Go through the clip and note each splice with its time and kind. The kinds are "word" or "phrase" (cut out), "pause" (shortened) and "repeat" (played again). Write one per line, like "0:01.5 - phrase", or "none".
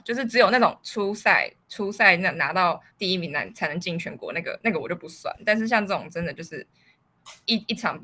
0:01.6 - pause
0:02.9 - pause